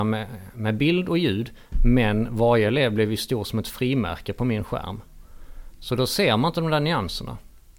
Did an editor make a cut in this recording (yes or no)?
no